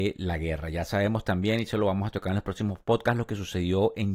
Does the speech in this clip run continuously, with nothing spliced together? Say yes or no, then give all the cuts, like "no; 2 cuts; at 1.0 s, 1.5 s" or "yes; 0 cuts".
yes; 0 cuts